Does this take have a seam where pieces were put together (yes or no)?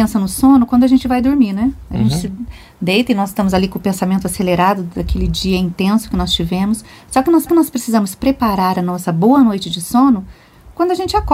yes